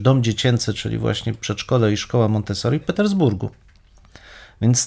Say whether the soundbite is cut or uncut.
cut